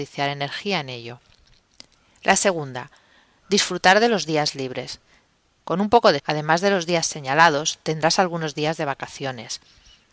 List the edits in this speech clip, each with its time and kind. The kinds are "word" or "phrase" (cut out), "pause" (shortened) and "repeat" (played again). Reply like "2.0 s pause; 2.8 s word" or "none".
6.2 s word